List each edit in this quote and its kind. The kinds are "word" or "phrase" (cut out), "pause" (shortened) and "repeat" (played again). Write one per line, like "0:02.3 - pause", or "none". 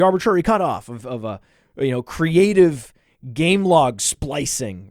none